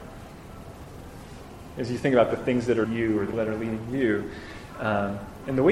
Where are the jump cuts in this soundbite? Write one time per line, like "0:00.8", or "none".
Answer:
0:02.8
0:03.3

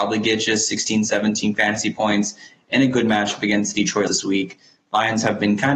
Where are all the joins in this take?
0:04.1

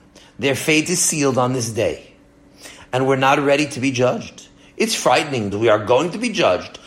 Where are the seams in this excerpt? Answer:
0:05.5

